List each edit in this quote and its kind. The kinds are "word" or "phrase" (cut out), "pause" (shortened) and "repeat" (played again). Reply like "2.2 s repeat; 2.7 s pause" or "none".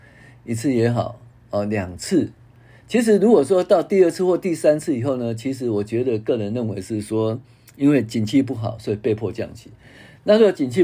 1.3 s pause